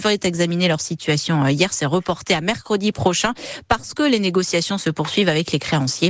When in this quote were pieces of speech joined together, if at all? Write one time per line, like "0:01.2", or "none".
none

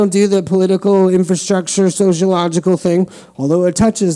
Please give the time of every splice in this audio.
none

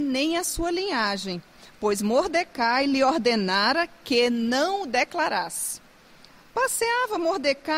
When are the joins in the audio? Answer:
none

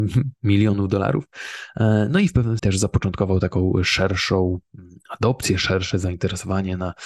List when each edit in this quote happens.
0:02.6

